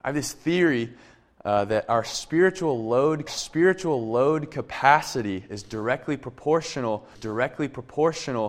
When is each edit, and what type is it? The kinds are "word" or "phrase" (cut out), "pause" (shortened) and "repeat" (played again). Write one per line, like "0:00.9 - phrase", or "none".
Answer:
0:03.3 - repeat
0:07.1 - repeat